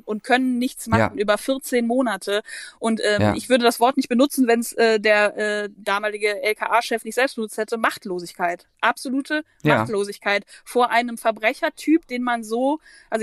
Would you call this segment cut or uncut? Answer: uncut